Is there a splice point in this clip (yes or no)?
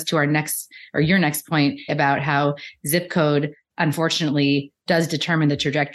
yes